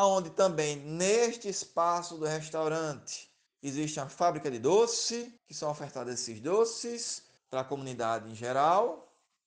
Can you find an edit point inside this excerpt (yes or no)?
yes